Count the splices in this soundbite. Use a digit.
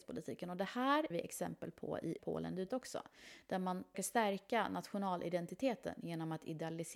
4